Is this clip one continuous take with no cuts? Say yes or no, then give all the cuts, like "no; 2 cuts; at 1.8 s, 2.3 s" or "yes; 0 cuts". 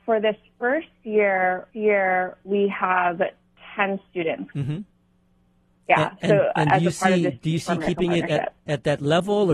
no; 2 cuts; at 1.7 s, 4.5 s